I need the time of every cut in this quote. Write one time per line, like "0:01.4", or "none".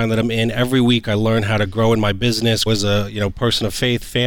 0:02.7